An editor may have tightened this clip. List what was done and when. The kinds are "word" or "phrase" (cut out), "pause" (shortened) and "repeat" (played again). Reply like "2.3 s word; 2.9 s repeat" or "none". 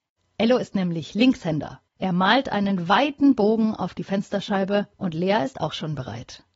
1.9 s pause; 4.9 s pause

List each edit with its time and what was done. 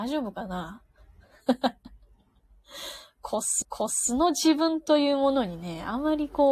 3.6 s repeat

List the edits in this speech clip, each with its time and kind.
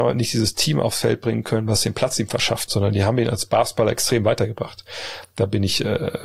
2.7 s word

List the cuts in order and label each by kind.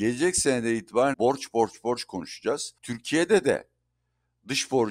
1.1 s word; 1.5 s word; 2.8 s pause

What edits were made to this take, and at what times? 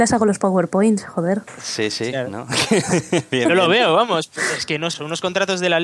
4.9 s word

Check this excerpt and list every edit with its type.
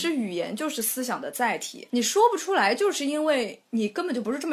1.9 s word

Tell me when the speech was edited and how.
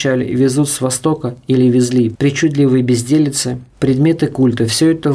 none

